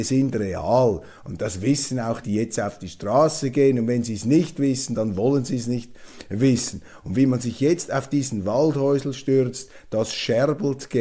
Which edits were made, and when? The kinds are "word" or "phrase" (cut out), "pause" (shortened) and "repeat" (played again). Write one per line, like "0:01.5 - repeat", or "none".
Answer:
0:02.2 - word